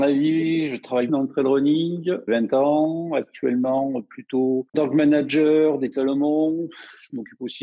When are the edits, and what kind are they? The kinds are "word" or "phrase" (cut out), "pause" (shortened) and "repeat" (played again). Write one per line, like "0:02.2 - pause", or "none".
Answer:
0:01.1 - word
0:02.3 - phrase
0:04.7 - word
0:05.9 - word